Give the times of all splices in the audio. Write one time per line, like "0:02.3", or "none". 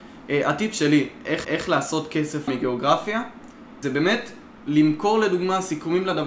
0:01.4
0:02.5
0:03.8